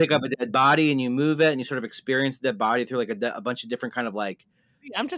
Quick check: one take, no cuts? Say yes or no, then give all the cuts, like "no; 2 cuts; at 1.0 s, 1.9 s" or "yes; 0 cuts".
yes; 0 cuts